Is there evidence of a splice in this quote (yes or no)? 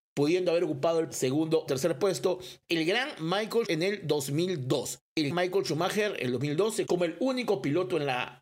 yes